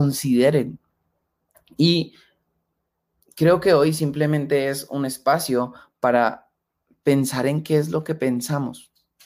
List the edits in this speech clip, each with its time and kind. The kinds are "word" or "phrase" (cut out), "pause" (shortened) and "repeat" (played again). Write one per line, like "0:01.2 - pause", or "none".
none

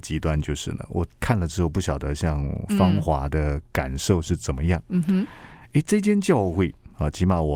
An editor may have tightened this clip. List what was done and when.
0:01.1 - pause

